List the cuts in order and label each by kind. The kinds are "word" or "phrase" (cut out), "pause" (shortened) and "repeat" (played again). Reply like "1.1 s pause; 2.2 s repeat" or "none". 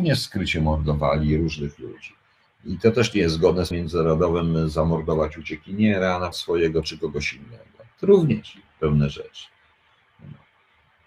3.7 s word; 6.3 s word

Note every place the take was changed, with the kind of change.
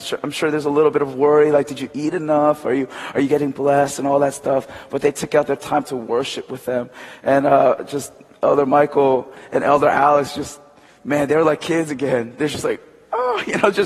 none

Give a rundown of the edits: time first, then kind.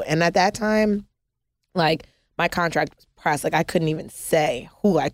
none

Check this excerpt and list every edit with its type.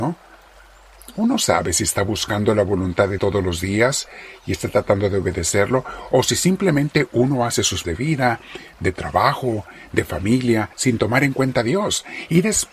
3.2 s word; 7.8 s word; 10.7 s pause

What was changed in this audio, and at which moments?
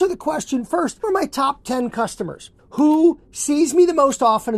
1.0 s word; 2.6 s pause

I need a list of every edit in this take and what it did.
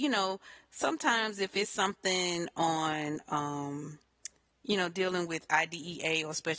none

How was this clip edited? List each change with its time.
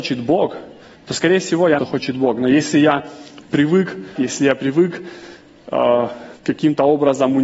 1.0 s pause; 1.8 s phrase; 4.2 s word; 6.4 s pause

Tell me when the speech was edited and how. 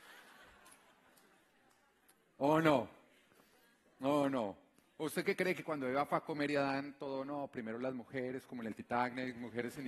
none

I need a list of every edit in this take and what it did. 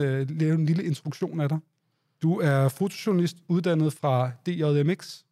none

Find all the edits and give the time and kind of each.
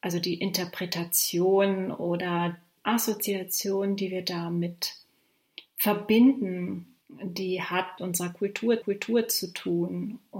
2.8 s word; 7.0 s pause; 8.0 s phrase; 8.8 s repeat

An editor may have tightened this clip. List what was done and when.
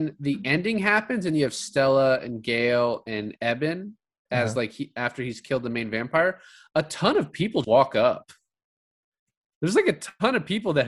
7.6 s word

